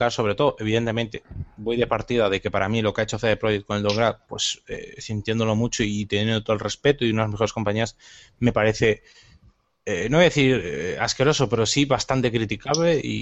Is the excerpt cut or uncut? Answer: uncut